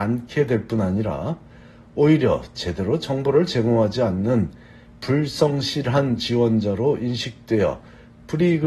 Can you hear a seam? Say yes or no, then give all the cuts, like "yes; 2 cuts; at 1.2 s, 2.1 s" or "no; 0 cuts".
no; 0 cuts